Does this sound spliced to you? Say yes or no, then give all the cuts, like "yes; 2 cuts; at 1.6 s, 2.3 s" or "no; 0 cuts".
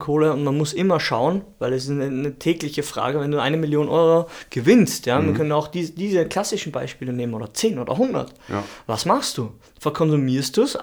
no; 0 cuts